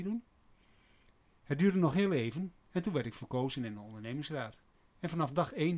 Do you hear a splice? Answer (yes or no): no